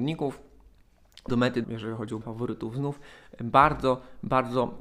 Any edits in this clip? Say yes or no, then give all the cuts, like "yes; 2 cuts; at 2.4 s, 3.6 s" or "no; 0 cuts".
yes; 3 cuts; at 1.3 s, 1.6 s, 2.2 s